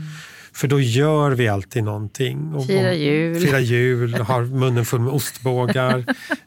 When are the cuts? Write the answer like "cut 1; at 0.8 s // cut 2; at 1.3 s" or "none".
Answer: none